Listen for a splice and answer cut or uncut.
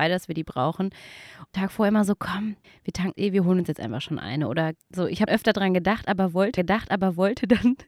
cut